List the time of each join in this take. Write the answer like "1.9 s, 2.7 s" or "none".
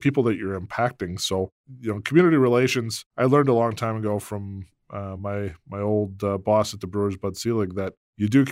none